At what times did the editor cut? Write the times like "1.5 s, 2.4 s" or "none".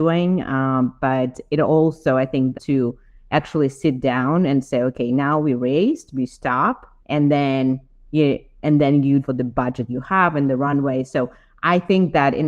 2.5 s, 7.0 s, 9.2 s